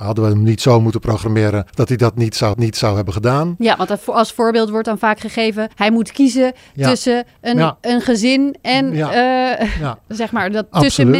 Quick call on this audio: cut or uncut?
cut